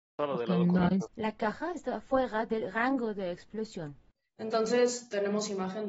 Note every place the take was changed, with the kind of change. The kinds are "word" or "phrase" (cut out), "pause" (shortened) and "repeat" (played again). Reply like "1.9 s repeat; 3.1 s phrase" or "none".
none